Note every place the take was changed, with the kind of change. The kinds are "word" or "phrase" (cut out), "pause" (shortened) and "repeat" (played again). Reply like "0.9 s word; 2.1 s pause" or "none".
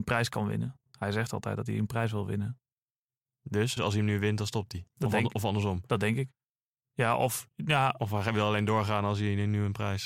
3.8 s word